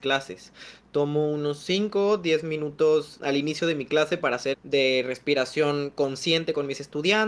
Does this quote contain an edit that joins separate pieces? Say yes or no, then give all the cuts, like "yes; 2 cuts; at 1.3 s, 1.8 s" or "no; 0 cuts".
yes; 2 cuts; at 3.2 s, 4.5 s